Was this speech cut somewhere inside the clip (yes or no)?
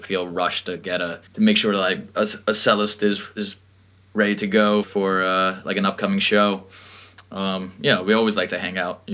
yes